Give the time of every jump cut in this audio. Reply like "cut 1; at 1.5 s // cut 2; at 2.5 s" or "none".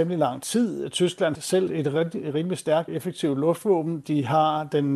cut 1; at 1.3 s // cut 2; at 1.7 s // cut 3; at 2.9 s